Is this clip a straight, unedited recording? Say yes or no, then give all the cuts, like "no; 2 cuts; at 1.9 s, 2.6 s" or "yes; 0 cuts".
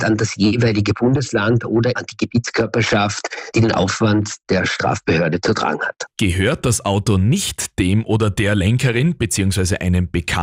no; 1 cut; at 2.0 s